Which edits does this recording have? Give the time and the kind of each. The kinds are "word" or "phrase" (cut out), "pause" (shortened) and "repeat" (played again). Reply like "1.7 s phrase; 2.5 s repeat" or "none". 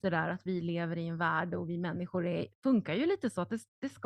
none